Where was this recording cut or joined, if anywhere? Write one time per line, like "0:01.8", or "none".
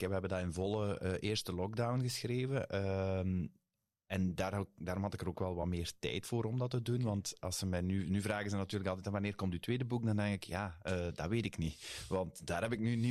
none